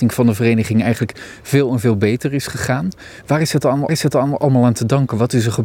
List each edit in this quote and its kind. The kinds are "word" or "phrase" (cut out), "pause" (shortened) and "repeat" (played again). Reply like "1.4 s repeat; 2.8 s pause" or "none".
3.9 s repeat